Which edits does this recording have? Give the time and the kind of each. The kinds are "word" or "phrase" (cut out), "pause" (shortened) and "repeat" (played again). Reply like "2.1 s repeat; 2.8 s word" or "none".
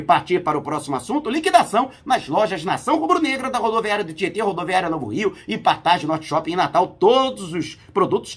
none